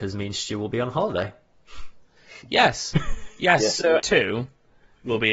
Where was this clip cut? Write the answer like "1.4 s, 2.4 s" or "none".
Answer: 4.0 s